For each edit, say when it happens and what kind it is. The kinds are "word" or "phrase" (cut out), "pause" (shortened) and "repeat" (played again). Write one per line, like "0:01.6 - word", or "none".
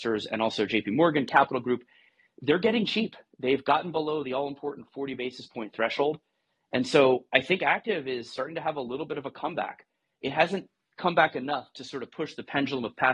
none